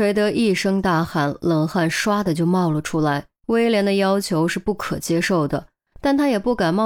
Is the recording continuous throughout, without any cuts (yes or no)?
no